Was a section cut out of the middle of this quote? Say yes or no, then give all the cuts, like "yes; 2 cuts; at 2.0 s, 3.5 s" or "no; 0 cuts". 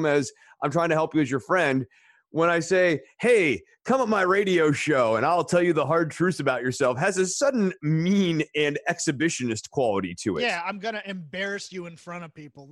no; 0 cuts